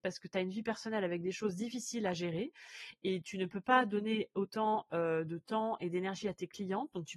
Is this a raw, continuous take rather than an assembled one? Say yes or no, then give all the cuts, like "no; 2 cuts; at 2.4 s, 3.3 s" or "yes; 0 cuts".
yes; 0 cuts